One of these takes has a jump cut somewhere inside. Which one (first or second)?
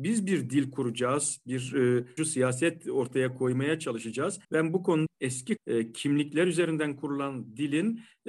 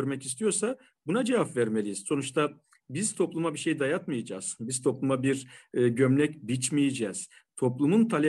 first